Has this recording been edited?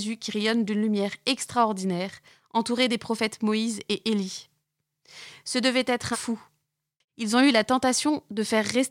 yes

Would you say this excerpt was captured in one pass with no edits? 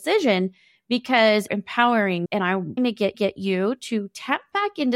no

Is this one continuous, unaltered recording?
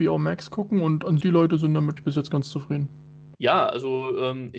no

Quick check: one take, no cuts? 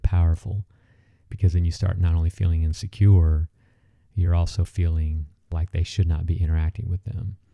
yes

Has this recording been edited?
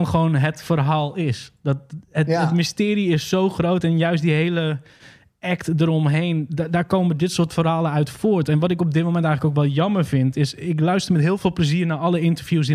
no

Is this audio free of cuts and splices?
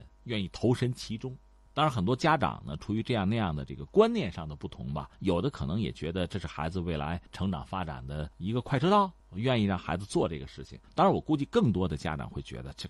no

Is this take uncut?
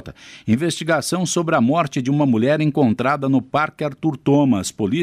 yes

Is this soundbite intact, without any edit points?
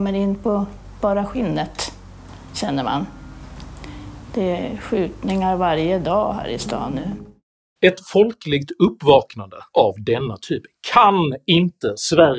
yes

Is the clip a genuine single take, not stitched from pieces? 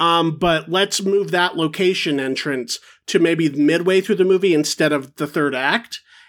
yes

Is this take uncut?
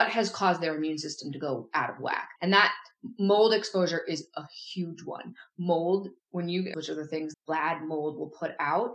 no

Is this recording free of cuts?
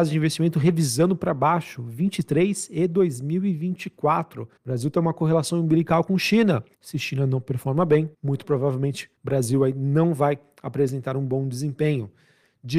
no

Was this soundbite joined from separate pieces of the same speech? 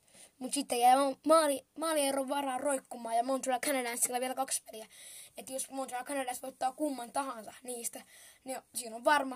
no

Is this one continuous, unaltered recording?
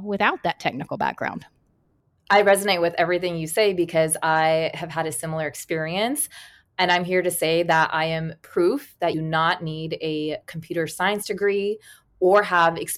no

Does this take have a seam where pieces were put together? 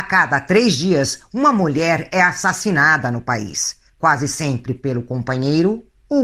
no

